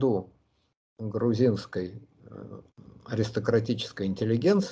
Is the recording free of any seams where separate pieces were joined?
no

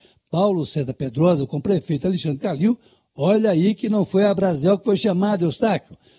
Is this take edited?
no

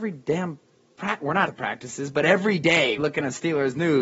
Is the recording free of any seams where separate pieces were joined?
no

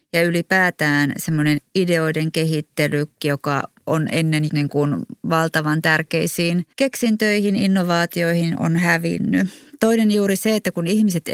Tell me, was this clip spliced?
yes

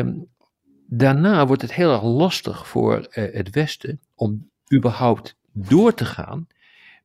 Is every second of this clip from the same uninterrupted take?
yes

